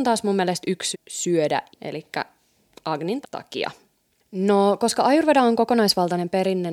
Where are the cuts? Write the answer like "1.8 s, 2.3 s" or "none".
0.9 s, 1.7 s, 3.2 s